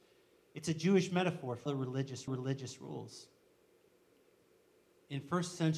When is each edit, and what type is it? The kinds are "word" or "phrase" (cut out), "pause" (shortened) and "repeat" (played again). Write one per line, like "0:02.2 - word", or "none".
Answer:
0:01.7 - word
0:02.3 - repeat